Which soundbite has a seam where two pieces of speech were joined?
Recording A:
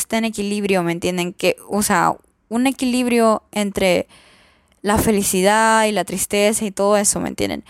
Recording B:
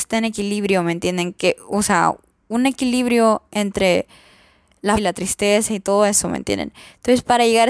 B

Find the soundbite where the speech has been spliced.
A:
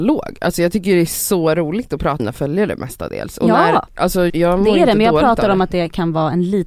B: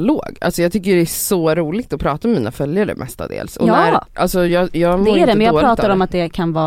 A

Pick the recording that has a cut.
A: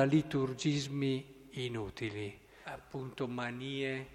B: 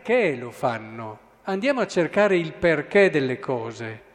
A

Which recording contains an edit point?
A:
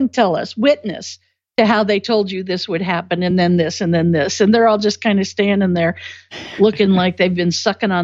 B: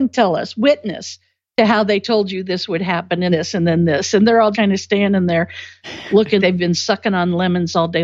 B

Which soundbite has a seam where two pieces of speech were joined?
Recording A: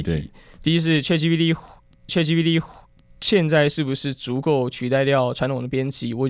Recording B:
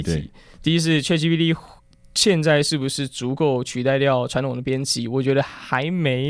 A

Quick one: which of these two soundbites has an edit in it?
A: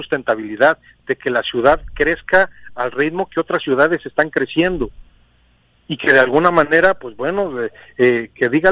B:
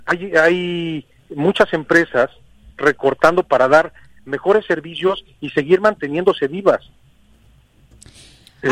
B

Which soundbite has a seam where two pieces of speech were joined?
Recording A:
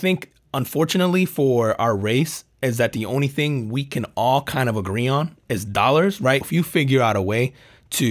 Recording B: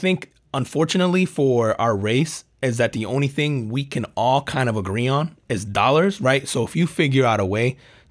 A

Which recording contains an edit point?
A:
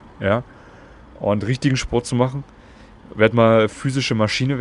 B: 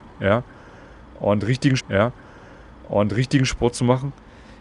B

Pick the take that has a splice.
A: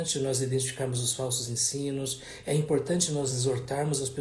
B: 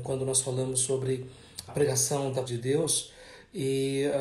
B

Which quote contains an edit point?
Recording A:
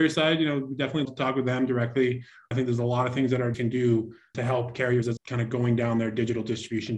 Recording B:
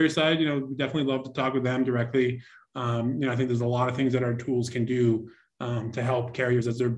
A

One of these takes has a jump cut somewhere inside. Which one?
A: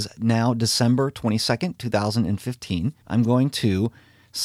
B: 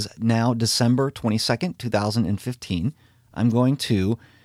A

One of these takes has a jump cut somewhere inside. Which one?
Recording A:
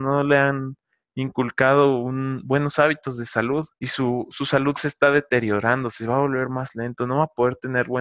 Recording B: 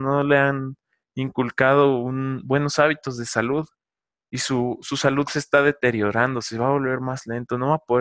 A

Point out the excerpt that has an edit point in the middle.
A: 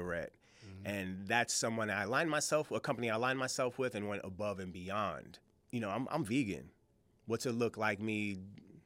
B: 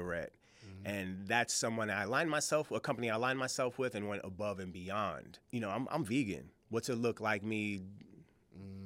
B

